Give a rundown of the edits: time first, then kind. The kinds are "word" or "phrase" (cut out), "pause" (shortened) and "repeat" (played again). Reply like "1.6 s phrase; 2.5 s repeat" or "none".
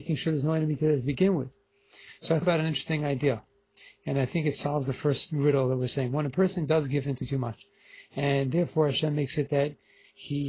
2.4 s word